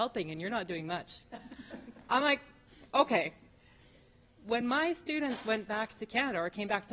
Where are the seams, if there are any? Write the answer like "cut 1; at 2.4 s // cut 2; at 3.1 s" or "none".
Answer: none

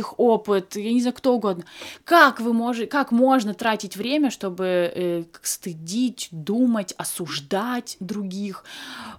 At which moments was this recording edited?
none

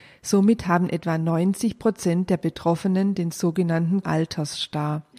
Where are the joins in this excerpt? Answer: cut 1; at 4.0 s

